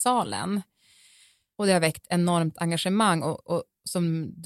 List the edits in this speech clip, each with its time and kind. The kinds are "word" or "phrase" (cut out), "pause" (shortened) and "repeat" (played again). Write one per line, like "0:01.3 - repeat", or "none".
none